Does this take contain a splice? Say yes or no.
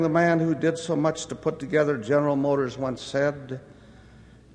no